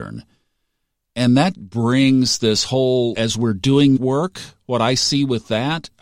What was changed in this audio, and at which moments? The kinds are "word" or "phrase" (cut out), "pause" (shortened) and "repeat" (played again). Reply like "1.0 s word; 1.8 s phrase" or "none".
1.5 s word; 3.1 s word; 4.0 s word